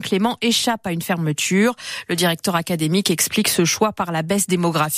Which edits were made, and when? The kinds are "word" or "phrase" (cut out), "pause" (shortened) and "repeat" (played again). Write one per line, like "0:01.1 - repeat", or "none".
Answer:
none